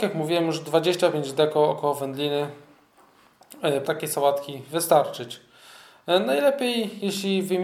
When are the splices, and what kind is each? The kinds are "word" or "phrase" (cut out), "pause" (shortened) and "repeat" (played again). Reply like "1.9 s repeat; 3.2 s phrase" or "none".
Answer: 3.9 s phrase

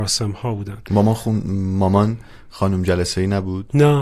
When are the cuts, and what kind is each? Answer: none

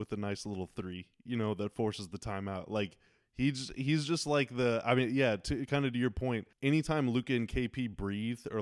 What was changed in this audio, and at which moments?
6.5 s pause

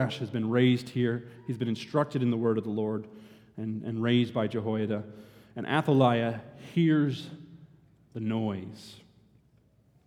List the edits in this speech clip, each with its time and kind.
none

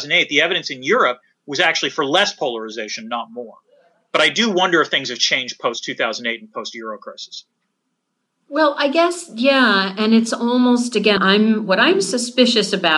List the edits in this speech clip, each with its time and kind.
11.2 s word

